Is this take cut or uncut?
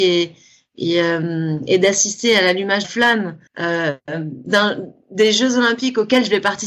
cut